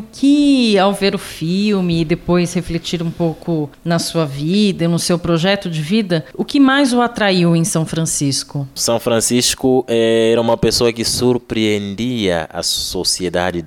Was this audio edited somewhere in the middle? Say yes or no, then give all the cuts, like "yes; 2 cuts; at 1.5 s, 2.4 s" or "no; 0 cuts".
no; 0 cuts